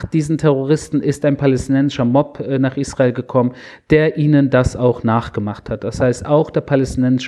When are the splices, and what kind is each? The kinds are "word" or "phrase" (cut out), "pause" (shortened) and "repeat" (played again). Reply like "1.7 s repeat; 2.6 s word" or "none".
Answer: none